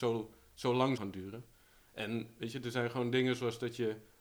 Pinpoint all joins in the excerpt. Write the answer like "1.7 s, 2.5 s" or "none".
1.0 s